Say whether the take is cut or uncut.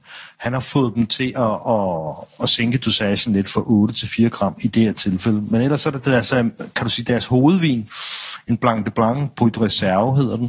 uncut